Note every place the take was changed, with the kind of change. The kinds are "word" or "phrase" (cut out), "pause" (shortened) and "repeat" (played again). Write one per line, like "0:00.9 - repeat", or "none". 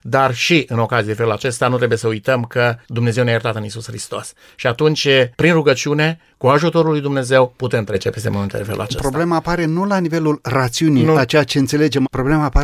0:05.3 - pause